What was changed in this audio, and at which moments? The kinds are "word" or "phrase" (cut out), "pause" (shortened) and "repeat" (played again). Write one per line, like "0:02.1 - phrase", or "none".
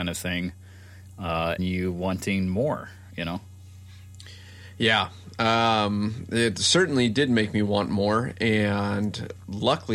0:01.6 - phrase